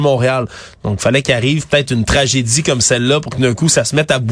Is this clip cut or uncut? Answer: uncut